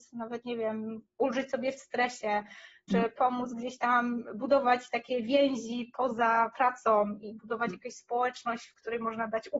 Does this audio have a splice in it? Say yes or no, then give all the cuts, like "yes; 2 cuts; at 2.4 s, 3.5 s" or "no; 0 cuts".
no; 0 cuts